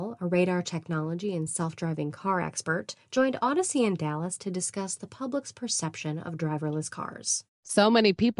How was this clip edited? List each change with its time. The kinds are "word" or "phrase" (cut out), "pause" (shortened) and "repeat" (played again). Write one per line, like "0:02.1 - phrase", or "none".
none